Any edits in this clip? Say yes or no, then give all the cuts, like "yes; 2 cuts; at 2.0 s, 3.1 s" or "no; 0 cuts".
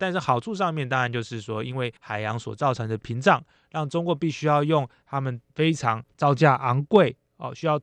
yes; 3 cuts; at 2.0 s, 5.5 s, 6.1 s